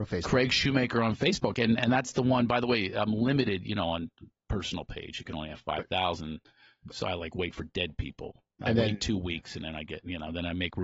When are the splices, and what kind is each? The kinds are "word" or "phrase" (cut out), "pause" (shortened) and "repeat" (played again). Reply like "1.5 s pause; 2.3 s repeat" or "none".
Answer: none